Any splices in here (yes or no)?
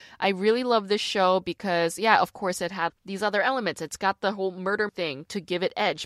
yes